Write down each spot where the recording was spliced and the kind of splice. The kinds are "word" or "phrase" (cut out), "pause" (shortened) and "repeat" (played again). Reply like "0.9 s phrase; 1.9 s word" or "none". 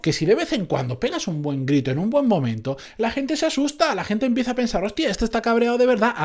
none